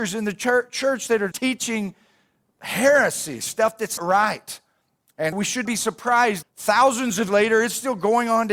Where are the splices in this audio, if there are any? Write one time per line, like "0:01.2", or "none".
0:01.3
0:04.0
0:05.3
0:05.7
0:06.4
0:07.3